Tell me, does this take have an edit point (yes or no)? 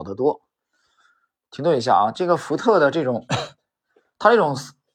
no